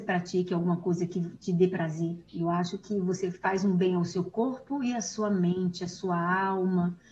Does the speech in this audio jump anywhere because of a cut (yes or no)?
no